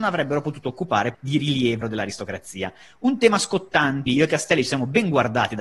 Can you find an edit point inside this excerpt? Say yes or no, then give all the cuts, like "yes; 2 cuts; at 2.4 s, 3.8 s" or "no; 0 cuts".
yes; 3 cuts; at 1.1 s, 1.8 s, 4.1 s